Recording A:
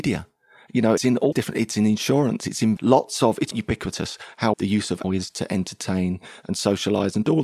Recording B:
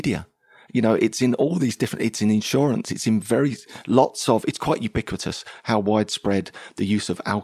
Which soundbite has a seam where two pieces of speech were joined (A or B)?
A